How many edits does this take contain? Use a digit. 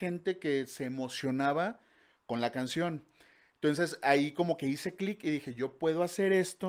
0